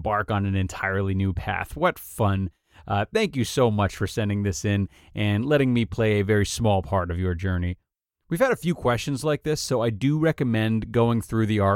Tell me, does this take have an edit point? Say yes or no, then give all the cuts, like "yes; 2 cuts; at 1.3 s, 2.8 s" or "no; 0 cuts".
no; 0 cuts